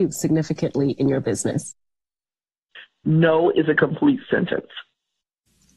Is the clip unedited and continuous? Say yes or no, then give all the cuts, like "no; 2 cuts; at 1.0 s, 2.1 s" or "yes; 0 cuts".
yes; 0 cuts